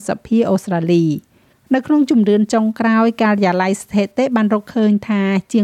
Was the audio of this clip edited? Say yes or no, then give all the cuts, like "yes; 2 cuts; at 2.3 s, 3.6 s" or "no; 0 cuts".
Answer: yes; 1 cut; at 1.5 s